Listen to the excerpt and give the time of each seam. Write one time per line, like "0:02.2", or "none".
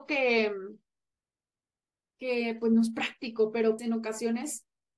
0:03.8